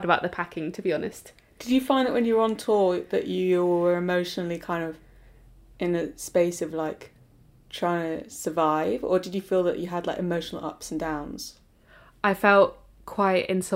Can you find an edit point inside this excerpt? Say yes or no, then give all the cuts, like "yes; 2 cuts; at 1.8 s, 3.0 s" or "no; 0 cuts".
no; 0 cuts